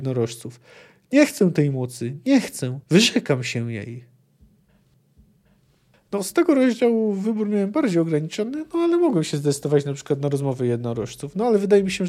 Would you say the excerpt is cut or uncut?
cut